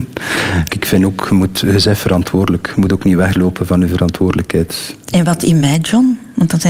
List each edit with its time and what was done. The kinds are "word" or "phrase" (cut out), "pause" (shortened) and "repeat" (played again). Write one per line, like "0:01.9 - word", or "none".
none